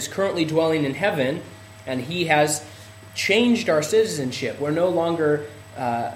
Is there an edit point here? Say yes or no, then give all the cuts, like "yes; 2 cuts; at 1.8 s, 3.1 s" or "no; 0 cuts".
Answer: no; 0 cuts